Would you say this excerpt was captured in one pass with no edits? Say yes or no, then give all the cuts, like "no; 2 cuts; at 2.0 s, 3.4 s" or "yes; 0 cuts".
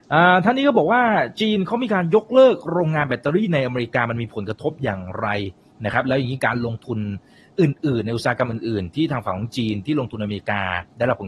yes; 0 cuts